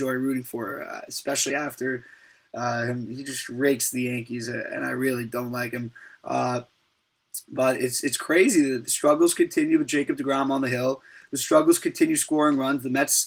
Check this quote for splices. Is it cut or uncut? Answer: uncut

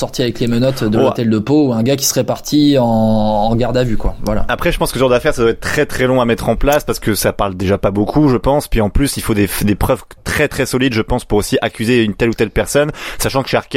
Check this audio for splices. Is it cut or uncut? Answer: uncut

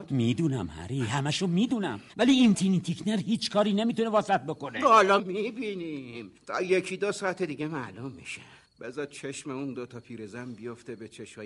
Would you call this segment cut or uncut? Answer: cut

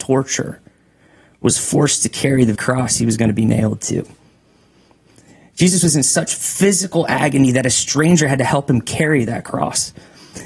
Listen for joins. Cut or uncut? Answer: cut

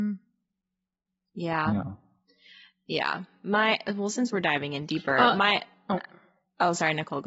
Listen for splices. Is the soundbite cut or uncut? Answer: uncut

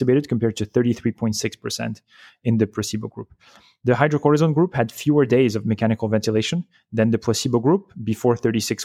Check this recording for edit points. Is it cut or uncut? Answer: uncut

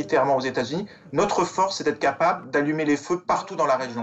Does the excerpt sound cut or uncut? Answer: uncut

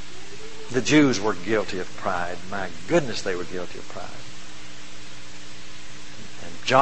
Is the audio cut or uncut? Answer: uncut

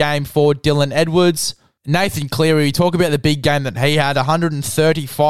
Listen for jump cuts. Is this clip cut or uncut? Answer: uncut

